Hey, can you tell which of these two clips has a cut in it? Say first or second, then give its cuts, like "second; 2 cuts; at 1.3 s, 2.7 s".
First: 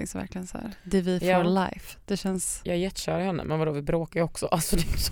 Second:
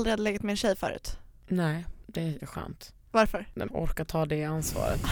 second; 2 cuts; at 2.4 s, 3.7 s